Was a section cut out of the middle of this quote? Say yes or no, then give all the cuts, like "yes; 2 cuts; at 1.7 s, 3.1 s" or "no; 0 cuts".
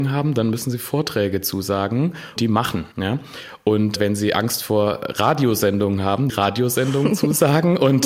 yes; 3 cuts; at 2.4 s, 2.9 s, 6.3 s